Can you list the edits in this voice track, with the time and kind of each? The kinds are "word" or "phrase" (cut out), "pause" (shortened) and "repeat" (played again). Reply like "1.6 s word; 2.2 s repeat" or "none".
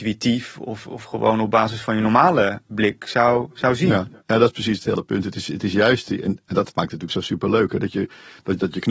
none